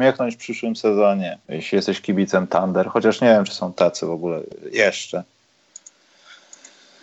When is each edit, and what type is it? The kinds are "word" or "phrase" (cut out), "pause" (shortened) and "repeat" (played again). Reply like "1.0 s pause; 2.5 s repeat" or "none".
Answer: 1.4 s pause